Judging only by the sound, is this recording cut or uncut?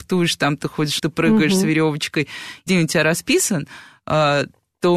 cut